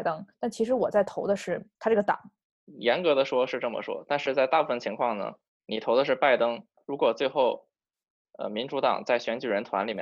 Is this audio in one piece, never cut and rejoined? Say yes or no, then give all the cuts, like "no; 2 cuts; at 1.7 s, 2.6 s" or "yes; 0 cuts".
no; 2 cuts; at 1.8 s, 5.5 s